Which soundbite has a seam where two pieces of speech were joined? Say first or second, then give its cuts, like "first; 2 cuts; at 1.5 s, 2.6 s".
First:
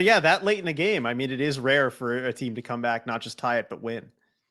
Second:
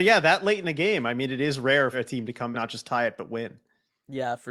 second; 2 cuts; at 1.9 s, 2.5 s